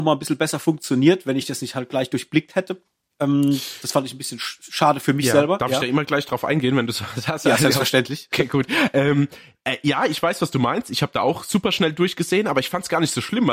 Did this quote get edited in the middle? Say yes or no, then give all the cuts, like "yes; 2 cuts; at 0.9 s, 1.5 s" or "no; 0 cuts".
no; 0 cuts